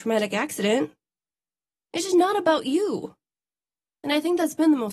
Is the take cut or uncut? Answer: uncut